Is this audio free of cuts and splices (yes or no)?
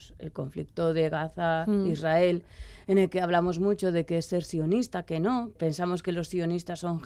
no